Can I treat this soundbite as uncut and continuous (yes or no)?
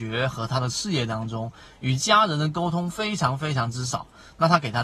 yes